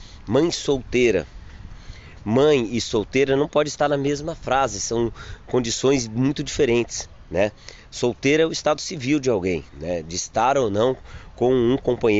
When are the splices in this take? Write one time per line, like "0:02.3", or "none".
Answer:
0:09.7